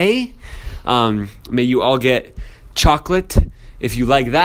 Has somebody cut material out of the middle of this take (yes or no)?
no